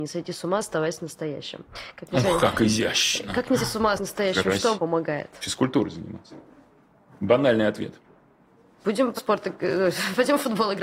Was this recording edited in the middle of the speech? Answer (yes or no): yes